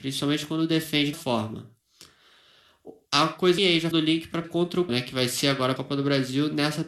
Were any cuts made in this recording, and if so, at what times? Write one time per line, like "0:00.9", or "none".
0:01.1
0:03.6
0:03.9
0:04.4
0:04.9
0:05.8